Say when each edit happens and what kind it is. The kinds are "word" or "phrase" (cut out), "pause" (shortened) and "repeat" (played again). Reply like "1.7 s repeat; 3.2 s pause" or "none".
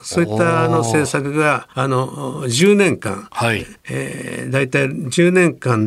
1.7 s pause; 3.8 s pause

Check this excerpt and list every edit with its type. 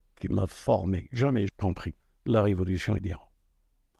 1.5 s word; 2.0 s pause; 3.0 s word

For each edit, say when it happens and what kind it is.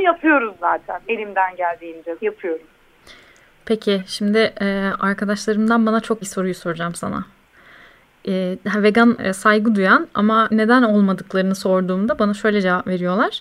2.2 s word; 6.2 s word; 9.2 s word; 10.5 s word

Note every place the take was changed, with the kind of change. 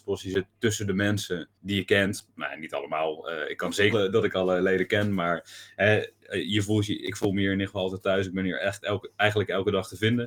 1.6 s pause; 3.9 s phrase

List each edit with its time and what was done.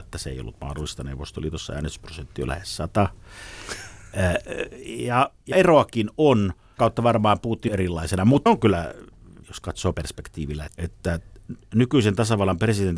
2.5 s word; 5.5 s word; 6.8 s word; 7.7 s word; 8.5 s word; 9.4 s word; 9.9 s word; 10.7 s word

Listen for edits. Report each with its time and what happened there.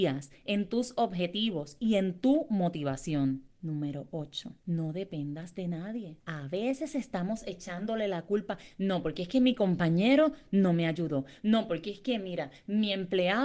3.5 s pause; 4.6 s pause; 6.2 s pause

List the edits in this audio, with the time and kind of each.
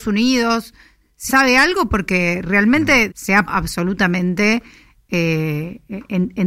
1.3 s word; 3.1 s word; 3.5 s word

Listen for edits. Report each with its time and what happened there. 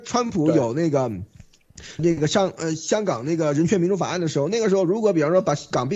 2.0 s word

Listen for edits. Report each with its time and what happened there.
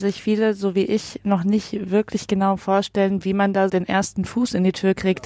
3.7 s word

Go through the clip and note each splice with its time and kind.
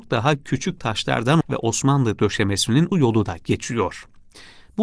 1.4 s word; 2.9 s phrase

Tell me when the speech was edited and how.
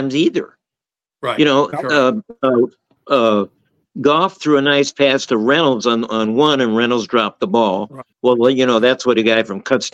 8.1 s pause

